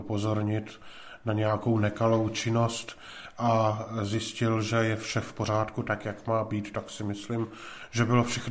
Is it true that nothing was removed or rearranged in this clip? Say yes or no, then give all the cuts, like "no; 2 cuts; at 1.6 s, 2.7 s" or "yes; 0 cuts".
yes; 0 cuts